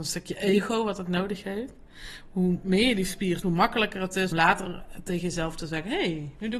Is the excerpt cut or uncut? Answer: cut